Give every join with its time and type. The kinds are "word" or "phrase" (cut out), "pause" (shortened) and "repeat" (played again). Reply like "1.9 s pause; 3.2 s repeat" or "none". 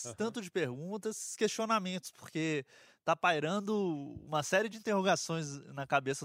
none